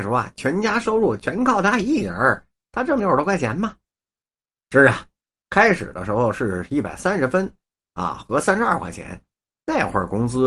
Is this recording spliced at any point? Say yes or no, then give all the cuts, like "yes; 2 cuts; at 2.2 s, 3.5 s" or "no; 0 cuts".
no; 0 cuts